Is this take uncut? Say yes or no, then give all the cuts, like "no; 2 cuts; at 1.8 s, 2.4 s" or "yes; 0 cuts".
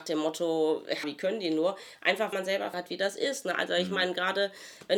no; 3 cuts; at 1.0 s, 2.3 s, 2.7 s